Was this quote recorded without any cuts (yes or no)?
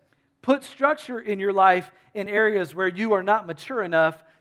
yes